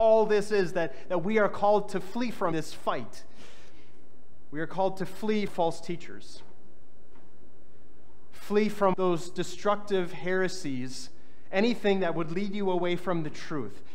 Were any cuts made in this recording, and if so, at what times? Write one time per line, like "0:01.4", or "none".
0:02.5
0:05.5
0:08.9